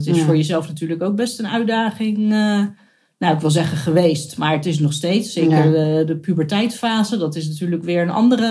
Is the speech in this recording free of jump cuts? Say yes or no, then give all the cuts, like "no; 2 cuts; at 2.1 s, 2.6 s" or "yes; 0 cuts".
yes; 0 cuts